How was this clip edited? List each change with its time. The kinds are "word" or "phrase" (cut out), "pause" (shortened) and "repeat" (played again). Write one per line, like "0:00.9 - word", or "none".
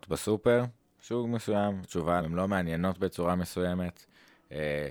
0:01.8 - word
0:02.2 - word